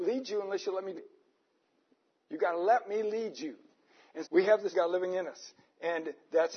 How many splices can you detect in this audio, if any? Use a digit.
3